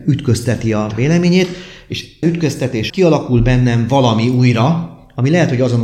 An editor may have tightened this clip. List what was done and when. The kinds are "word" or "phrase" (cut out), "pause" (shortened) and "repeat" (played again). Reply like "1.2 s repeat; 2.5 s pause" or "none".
0.9 s word; 2.2 s word; 2.9 s word